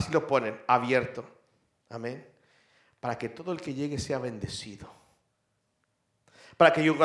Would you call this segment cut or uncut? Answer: uncut